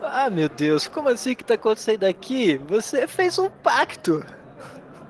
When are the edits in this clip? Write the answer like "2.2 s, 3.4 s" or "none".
none